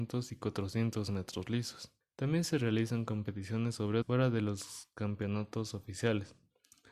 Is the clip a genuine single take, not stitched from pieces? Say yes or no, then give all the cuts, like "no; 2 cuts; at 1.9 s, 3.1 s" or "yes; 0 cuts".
no; 2 cuts; at 2.0 s, 4.0 s